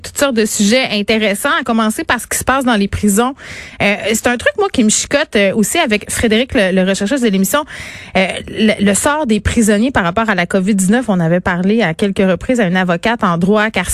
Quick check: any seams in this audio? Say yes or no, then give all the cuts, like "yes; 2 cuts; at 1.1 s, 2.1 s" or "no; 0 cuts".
no; 0 cuts